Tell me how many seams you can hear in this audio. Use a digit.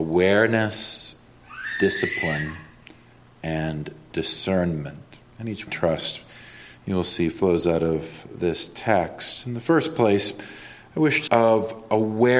2